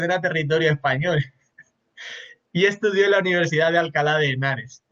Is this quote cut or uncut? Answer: uncut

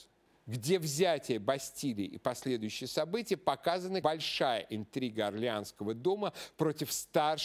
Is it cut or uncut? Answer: cut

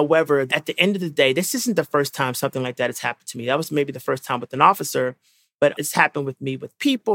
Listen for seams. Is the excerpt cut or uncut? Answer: uncut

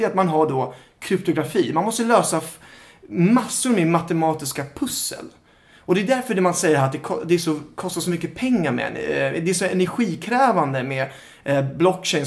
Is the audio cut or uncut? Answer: uncut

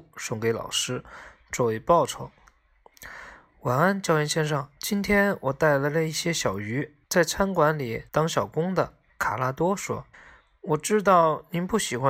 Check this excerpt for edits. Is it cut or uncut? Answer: cut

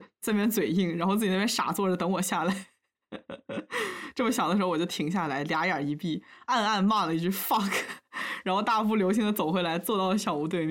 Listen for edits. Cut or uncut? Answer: uncut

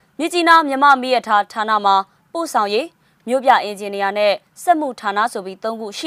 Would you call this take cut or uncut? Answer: uncut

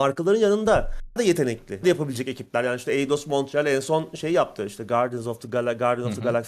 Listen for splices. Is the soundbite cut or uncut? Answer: cut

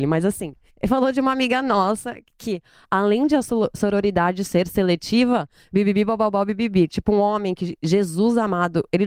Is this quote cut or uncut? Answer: uncut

